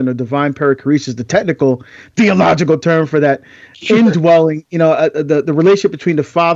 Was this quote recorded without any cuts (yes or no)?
yes